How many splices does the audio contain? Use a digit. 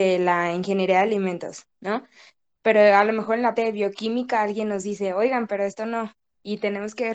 1